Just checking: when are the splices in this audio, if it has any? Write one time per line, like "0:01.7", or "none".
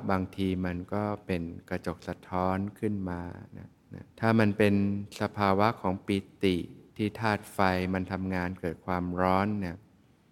0:04.1
0:06.9

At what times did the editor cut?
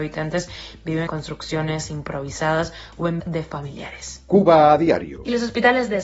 0:01.1
0:03.2

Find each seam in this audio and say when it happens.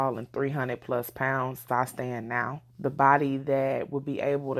0:01.7
0:02.7

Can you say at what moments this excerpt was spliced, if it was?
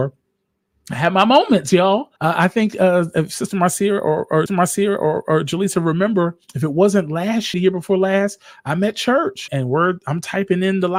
0:02.2
0:04.5
0:06.4
0:07.5
0:09.5

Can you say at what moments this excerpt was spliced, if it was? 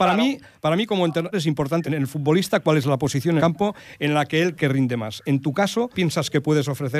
0:01.3
0:01.8
0:03.4
0:04.6
0:05.9

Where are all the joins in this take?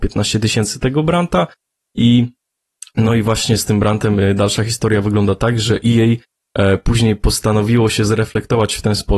none

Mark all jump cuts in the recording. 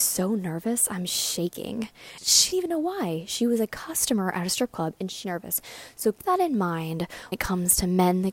0:02.5
0:05.2
0:06.2
0:07.3

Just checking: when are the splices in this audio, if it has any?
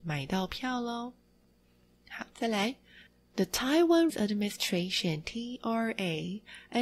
0:04.1

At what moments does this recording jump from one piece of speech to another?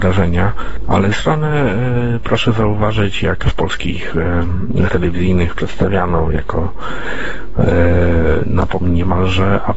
0:01.1
0:03.4
0:04.9
0:08.8

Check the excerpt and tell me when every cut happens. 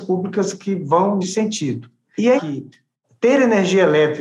0:01.2
0:02.4

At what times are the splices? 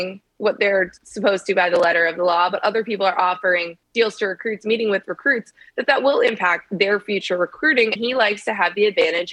0:03.8
0:08.0

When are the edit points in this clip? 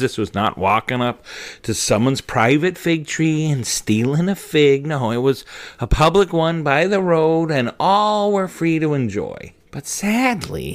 0:09.6

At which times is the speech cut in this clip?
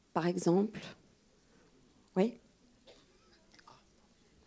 none

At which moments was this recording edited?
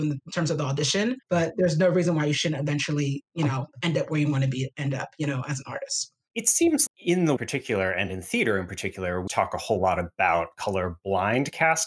0:01.2
0:06.9
0:07.4
0:09.3

